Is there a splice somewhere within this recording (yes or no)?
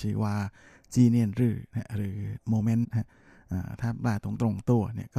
yes